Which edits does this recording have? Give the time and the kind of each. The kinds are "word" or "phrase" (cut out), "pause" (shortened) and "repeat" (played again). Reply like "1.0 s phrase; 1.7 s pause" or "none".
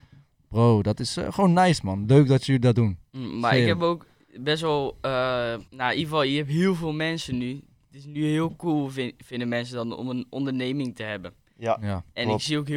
5.7 s pause